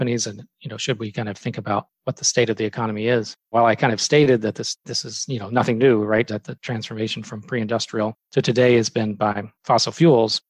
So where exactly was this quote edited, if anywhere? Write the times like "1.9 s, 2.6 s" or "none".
3.4 s, 4.8 s, 6.3 s, 9.2 s

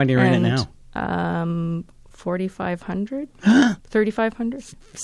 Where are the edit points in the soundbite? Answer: 3.8 s

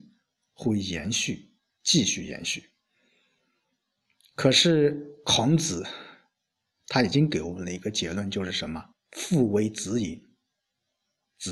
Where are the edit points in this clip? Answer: 1.7 s, 8.9 s

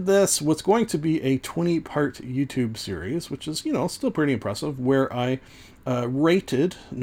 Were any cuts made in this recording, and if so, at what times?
none

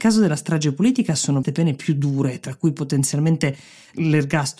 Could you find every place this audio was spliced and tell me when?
1.4 s

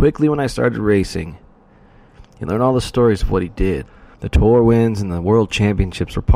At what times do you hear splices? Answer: 4.1 s

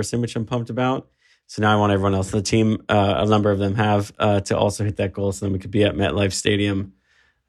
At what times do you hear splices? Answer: none

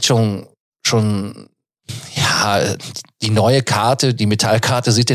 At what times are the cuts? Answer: none

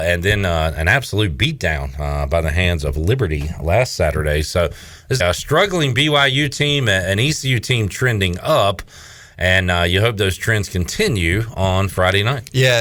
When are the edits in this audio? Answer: 5.2 s

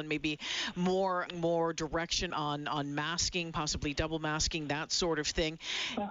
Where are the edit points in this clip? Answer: 1.3 s, 2.3 s

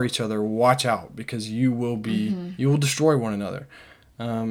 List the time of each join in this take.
none

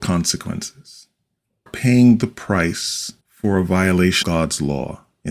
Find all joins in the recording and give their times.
1.7 s, 3.2 s, 4.2 s

